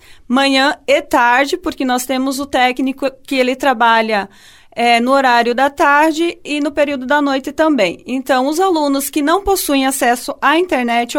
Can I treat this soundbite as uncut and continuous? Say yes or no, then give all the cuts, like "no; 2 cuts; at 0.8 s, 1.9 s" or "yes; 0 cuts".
yes; 0 cuts